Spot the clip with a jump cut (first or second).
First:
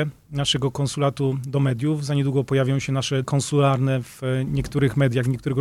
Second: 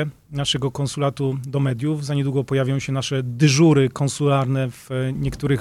first